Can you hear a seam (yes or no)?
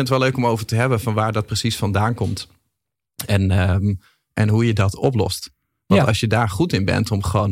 no